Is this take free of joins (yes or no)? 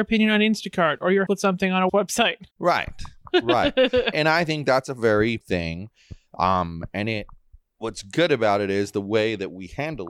no